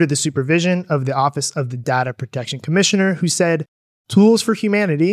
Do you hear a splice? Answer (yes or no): no